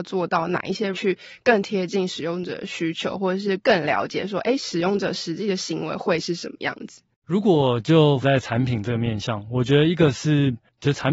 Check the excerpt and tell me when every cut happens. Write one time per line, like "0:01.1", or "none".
0:00.9
0:08.2